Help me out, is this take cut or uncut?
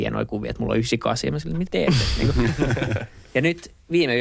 cut